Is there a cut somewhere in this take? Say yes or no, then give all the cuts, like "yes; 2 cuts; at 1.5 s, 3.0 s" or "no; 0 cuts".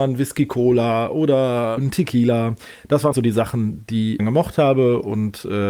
yes; 3 cuts; at 1.8 s, 3.1 s, 4.2 s